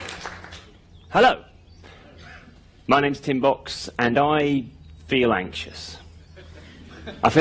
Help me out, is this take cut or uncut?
uncut